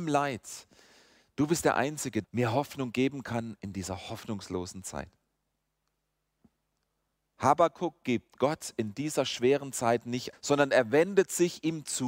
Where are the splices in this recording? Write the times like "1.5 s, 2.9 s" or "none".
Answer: 2.2 s, 10.3 s